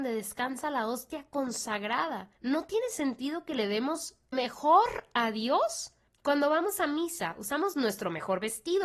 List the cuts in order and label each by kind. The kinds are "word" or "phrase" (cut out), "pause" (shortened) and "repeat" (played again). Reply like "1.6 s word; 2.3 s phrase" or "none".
2.3 s pause; 4.3 s word; 6.1 s pause